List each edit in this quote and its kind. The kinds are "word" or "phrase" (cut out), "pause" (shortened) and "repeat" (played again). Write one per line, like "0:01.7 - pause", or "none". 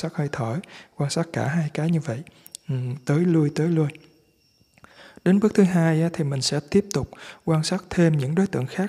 none